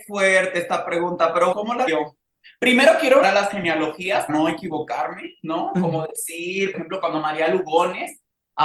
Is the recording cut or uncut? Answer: cut